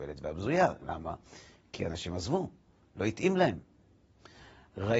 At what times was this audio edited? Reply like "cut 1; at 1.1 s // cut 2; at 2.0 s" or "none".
none